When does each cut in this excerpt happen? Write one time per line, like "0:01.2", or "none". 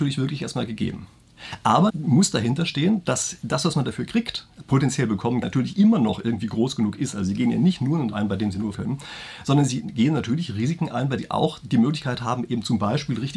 0:01.9
0:05.4
0:08.1
0:08.7
0:11.2

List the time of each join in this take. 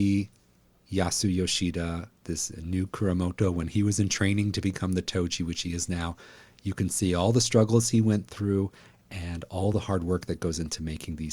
none

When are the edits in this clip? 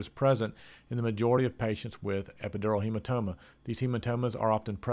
none

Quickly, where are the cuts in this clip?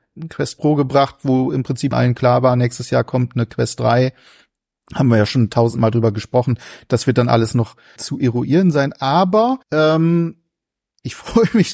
0:01.9
0:08.0
0:09.6

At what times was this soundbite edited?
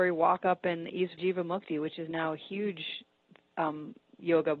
0:01.2

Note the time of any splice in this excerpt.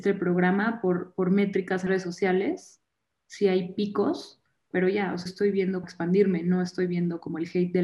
0:01.9
0:04.7
0:05.3
0:05.8

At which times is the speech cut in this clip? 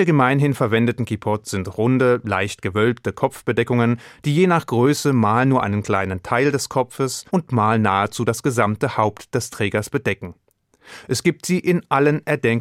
0:07.3

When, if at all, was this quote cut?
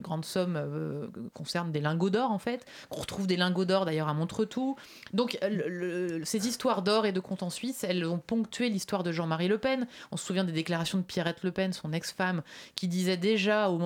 none

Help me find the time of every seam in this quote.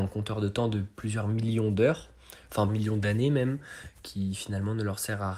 0:02.7

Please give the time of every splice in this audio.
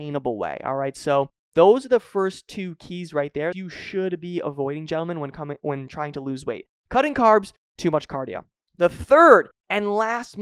0:03.5

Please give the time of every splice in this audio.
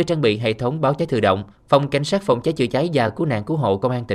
0:01.5

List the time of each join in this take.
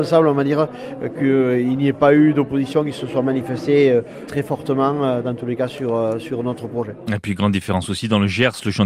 none

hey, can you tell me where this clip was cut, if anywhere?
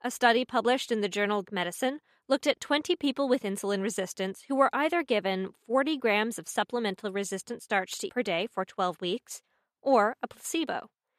0:01.4
0:08.1

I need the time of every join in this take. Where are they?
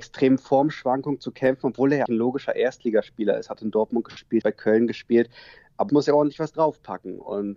0:02.1
0:04.4
0:05.9

